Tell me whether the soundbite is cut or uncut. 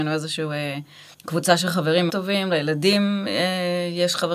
cut